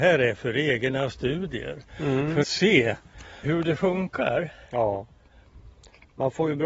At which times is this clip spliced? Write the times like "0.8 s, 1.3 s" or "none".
2.4 s, 3.4 s